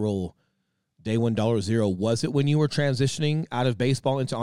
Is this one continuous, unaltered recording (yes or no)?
yes